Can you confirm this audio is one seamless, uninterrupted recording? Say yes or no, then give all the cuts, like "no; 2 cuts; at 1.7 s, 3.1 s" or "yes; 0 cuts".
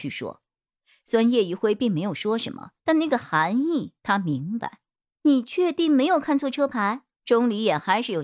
no; 4 cuts; at 2.8 s, 4.0 s, 5.1 s, 7.1 s